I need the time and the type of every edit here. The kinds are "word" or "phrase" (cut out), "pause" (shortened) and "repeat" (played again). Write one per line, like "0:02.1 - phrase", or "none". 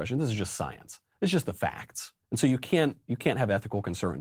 0:02.2 - pause